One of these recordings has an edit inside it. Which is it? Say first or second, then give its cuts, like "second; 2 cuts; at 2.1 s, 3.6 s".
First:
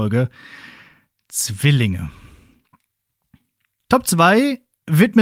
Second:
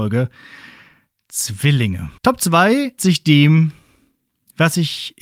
second; 2 cuts; at 2.2 s, 3.0 s